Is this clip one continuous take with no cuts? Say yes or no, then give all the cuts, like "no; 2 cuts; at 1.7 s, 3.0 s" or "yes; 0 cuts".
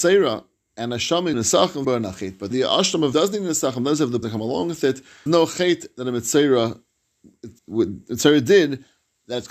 no; 7 cuts; at 1.3 s, 1.8 s, 2.5 s, 3.1 s, 4.2 s, 5.3 s, 7.6 s